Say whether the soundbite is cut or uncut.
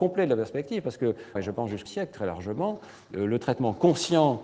cut